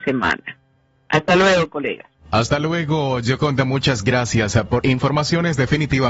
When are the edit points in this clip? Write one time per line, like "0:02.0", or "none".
0:04.8

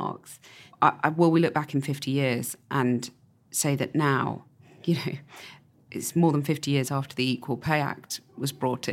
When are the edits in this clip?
none

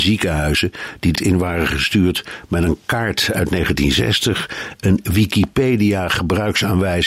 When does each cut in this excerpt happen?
0:01.1

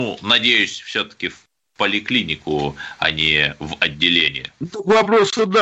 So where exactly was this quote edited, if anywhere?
0:04.7

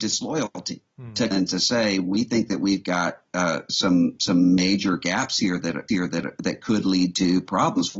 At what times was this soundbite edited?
0:01.3
0:05.9

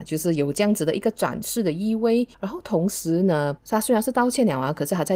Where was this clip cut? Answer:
0:02.3
0:03.6

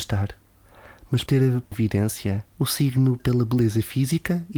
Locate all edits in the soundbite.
0:01.3
0:01.7
0:02.5
0:03.2

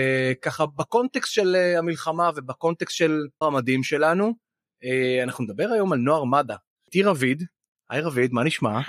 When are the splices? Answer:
0:03.4

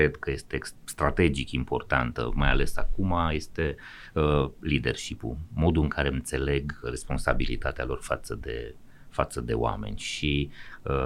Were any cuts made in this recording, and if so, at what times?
0:06.1
0:06.8

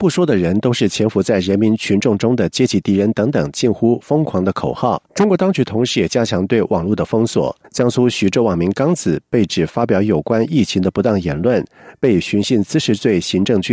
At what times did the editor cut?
0:05.1
0:07.6

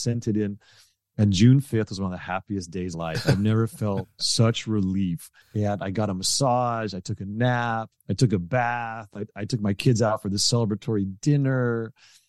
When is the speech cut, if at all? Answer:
0:02.9
0:05.4
0:08.0

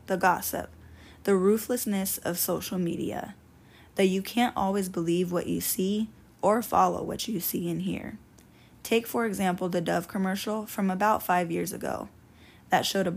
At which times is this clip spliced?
none

